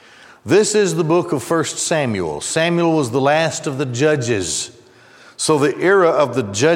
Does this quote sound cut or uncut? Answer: uncut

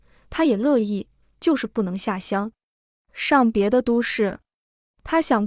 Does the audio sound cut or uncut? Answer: uncut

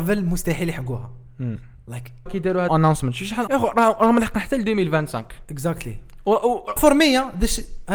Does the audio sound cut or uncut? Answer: cut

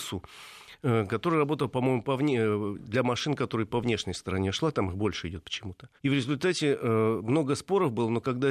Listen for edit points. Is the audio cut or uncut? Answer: cut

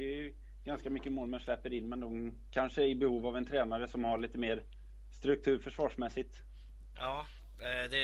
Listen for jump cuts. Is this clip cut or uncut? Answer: uncut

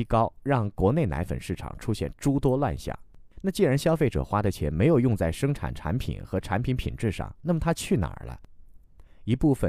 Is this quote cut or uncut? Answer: cut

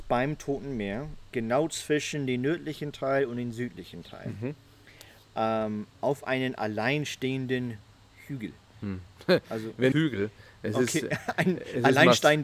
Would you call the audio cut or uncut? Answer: cut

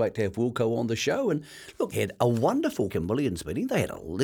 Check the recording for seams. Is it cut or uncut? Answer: cut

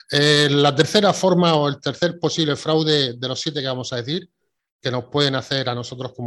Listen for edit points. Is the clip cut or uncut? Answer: uncut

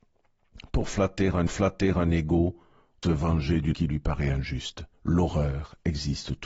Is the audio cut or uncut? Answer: cut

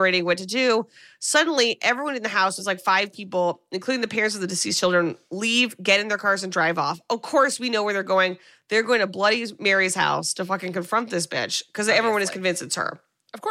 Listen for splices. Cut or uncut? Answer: uncut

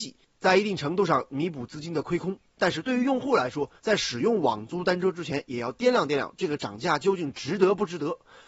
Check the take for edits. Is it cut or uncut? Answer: cut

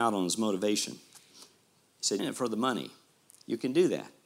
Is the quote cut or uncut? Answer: cut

